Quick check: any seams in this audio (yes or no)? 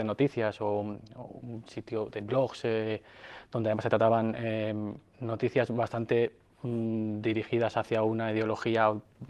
no